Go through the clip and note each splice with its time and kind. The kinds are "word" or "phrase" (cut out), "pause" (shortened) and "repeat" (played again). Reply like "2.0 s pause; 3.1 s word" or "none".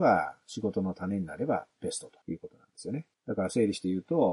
2.2 s pause; 3.1 s pause